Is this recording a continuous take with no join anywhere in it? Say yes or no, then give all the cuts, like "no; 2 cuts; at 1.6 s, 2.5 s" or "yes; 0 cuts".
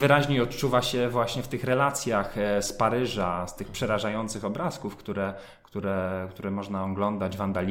yes; 0 cuts